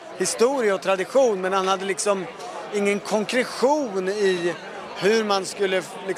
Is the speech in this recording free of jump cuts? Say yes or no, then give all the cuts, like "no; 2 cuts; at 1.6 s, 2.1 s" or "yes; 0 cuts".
yes; 0 cuts